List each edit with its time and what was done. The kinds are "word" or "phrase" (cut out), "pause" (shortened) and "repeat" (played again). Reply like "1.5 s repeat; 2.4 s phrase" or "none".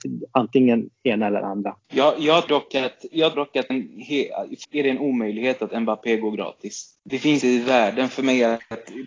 1.8 s pause; 2.5 s word; 3.3 s word; 3.7 s phrase; 4.6 s word; 7.0 s pause; 7.4 s word